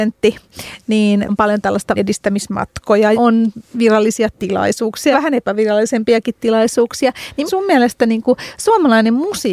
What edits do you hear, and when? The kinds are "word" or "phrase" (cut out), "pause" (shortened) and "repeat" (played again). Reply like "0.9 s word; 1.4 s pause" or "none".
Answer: 1.3 s word; 2.0 s word; 3.1 s word; 5.1 s word; 7.5 s word

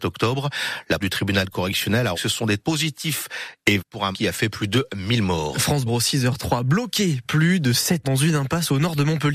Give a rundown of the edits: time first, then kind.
1.0 s word; 2.1 s word; 2.6 s word; 3.8 s word; 4.1 s word; 5.9 s word; 7.2 s word; 8.0 s word

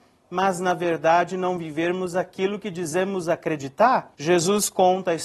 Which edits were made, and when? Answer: 4.1 s pause

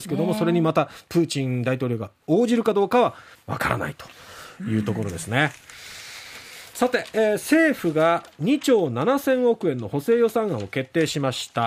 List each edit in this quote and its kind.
3.3 s pause

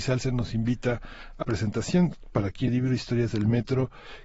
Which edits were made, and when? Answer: 1.4 s word; 2.7 s phrase

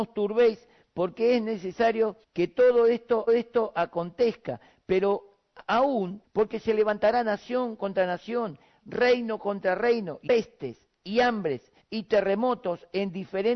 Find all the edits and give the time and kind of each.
2.2 s pause; 3.3 s repeat; 6.2 s phrase; 10.3 s word; 11.8 s pause

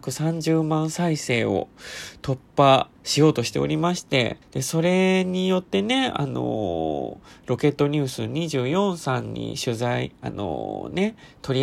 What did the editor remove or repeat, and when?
3.0 s pause; 4.4 s pause; 10.1 s pause

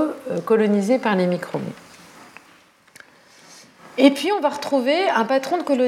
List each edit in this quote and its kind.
none

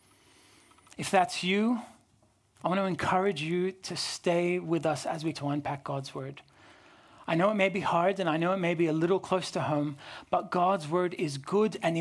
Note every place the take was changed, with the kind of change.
5.3 s word

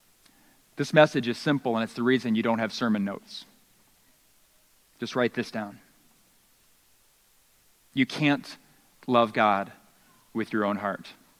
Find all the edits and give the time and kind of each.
none

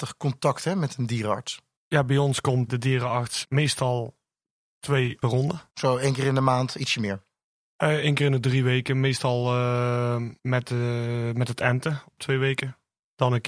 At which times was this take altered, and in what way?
1.8 s pause; 2.7 s word; 3.4 s word; 5.2 s phrase; 5.7 s pause; 10.4 s pause

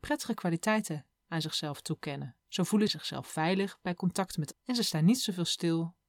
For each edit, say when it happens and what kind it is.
2.4 s pause; 2.9 s word; 4.5 s word

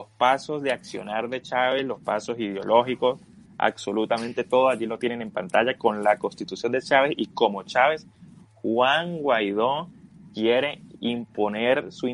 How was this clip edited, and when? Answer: none

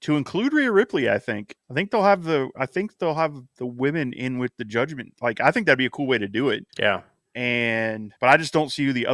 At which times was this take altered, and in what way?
1.6 s pause; 6.7 s pause; 8.2 s pause

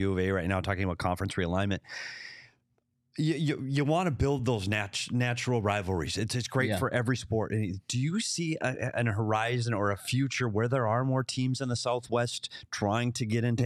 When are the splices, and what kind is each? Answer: none

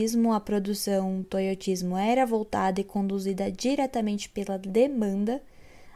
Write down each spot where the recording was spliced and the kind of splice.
1.2 s word

